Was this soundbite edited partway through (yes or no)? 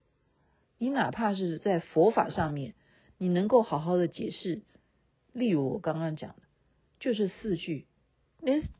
no